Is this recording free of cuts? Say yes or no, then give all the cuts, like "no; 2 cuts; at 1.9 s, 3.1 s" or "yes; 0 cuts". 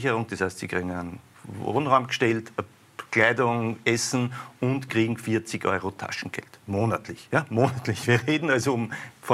no; 2 cuts; at 1.3 s, 6.6 s